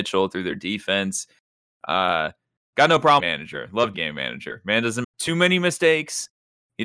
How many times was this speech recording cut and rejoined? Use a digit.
3